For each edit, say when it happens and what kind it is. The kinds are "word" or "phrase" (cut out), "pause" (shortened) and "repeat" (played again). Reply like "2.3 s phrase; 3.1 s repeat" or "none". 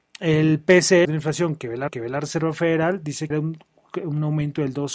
1.0 s phrase; 1.9 s repeat; 3.3 s phrase